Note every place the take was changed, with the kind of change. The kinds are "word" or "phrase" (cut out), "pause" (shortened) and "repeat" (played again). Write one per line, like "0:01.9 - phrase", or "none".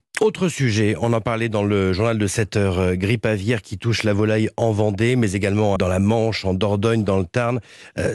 0:05.8 - word